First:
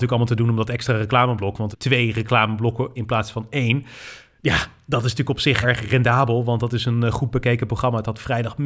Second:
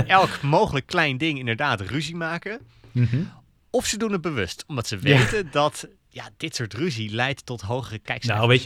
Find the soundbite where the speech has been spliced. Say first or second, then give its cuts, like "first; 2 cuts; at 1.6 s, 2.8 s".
first; 3 cuts; at 1.7 s, 3.0 s, 5.6 s